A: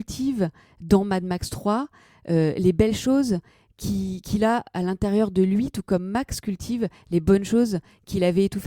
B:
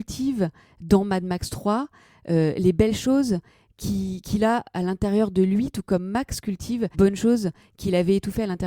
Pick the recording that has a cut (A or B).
B